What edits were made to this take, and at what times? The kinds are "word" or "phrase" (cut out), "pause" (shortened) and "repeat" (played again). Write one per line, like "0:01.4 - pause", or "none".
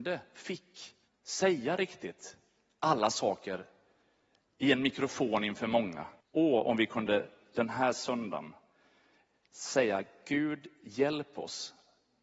0:01.1 - pause
0:06.2 - pause